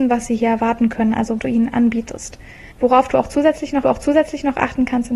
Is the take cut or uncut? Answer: cut